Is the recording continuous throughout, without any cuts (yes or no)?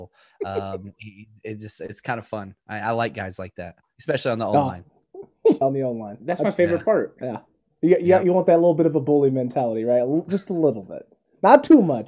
no